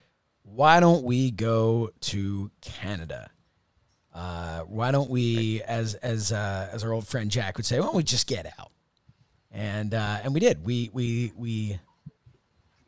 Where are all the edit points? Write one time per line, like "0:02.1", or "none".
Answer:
none